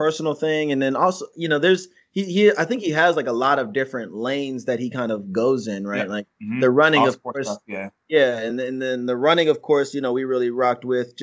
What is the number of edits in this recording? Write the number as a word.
zero